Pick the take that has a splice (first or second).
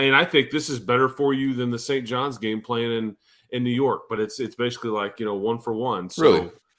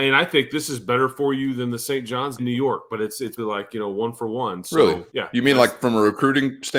second